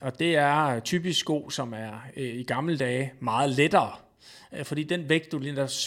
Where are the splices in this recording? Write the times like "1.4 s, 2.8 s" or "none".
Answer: none